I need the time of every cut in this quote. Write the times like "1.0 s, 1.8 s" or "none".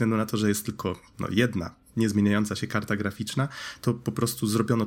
none